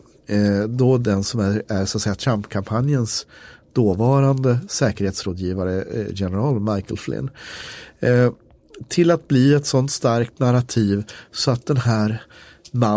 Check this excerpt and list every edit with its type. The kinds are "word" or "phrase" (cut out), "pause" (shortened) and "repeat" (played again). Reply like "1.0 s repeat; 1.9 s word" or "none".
none